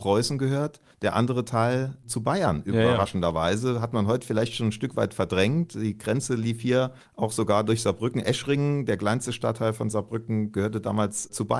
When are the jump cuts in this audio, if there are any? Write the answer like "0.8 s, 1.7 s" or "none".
none